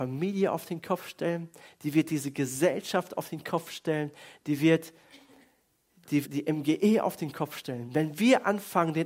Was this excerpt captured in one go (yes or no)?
no